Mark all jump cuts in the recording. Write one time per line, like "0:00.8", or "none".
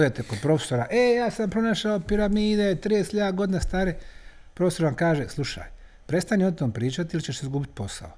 none